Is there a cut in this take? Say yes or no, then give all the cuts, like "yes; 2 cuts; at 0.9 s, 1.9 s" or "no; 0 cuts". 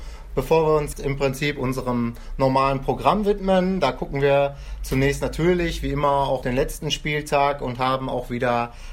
yes; 2 cuts; at 0.9 s, 6.4 s